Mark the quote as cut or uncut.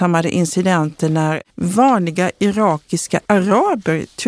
cut